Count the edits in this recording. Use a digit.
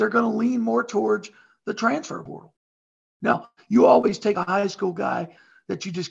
0